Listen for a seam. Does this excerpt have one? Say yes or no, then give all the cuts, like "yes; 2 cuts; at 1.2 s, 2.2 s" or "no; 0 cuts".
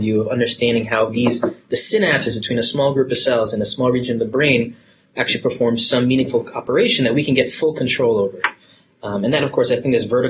no; 0 cuts